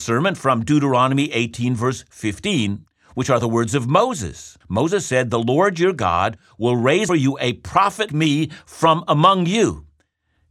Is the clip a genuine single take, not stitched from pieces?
no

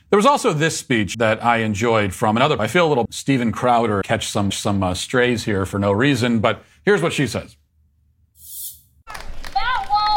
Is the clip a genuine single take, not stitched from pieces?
no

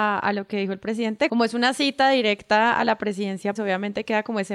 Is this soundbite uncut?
no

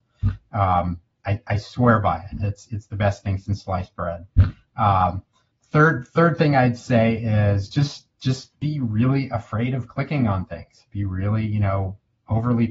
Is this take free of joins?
yes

